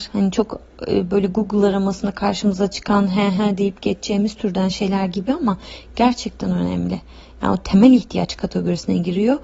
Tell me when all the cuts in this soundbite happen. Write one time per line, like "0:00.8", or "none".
none